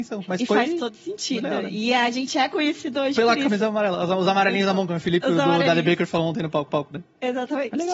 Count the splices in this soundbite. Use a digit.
1